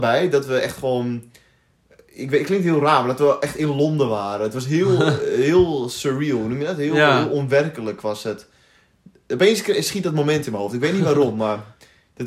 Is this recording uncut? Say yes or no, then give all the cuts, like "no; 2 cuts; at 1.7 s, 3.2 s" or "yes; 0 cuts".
yes; 0 cuts